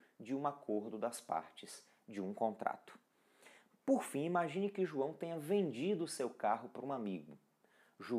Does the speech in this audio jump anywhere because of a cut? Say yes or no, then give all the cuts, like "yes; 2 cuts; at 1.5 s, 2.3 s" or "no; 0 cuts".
no; 0 cuts